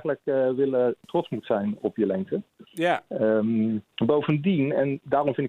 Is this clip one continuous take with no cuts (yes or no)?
no